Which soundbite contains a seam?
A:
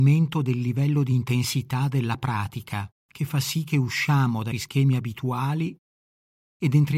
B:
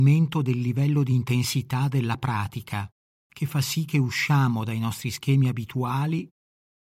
A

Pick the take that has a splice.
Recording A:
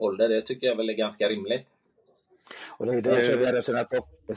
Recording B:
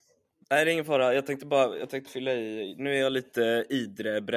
B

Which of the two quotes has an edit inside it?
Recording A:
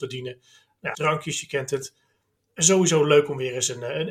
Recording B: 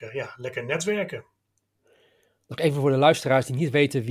A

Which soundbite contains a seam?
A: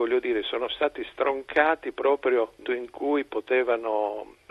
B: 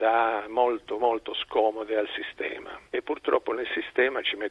A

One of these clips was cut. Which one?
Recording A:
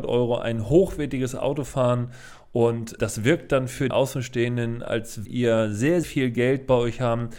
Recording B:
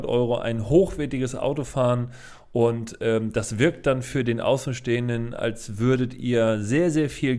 A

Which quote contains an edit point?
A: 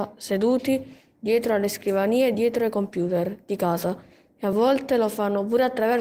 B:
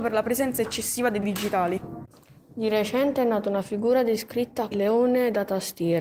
B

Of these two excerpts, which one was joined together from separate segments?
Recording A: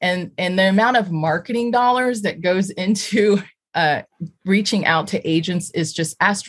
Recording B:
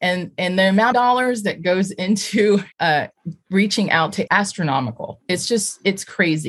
B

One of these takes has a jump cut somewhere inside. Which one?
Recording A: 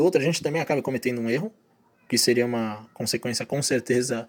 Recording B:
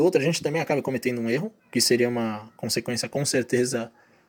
B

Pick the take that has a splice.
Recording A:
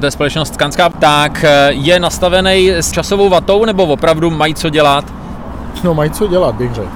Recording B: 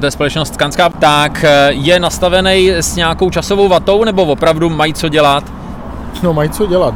A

